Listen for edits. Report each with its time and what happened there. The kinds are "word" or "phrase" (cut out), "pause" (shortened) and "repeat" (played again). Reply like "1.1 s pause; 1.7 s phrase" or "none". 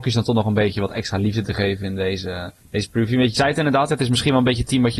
2.6 s pause

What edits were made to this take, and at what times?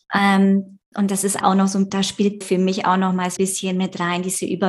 1.4 s word; 1.9 s word; 2.4 s word; 3.4 s word

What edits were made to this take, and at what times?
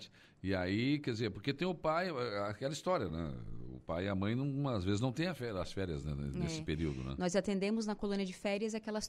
none

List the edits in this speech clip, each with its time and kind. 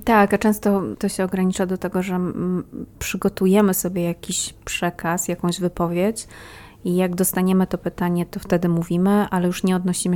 0.9 s word

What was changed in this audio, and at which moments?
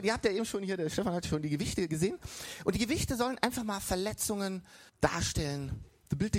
4.9 s pause

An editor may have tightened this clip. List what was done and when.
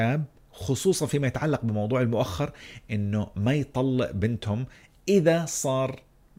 none

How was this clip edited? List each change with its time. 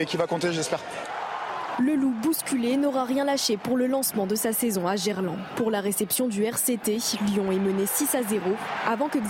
none

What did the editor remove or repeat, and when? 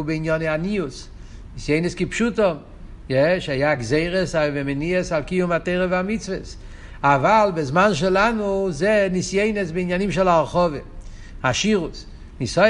none

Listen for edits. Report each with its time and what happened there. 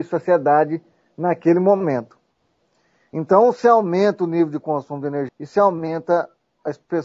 5.3 s word

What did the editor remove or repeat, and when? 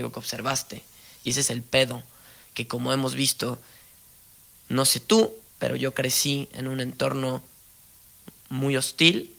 5.5 s pause

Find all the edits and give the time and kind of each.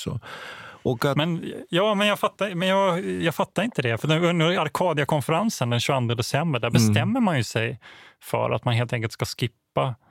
none

